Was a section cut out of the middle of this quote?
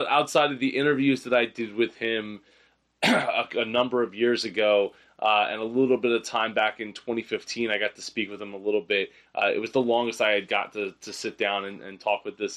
no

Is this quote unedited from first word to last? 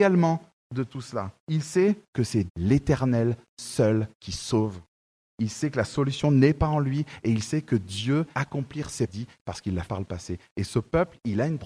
no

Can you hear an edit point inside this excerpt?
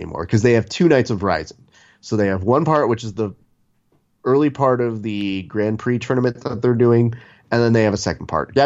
no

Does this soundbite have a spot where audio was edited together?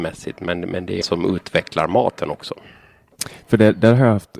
yes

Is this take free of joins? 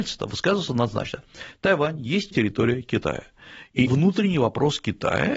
no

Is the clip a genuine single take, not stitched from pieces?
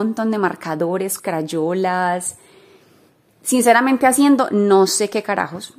no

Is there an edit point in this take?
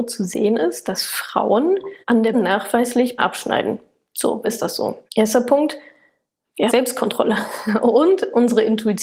yes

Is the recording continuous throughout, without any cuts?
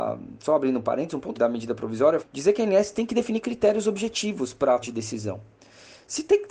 no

